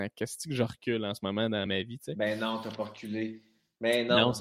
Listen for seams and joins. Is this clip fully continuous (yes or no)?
yes